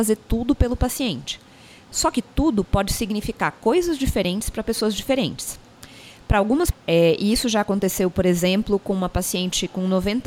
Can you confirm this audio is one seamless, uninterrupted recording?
no; 1 cut; at 6.7 s

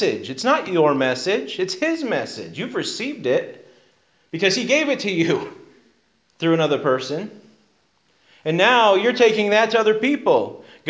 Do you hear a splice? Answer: no; 0 cuts

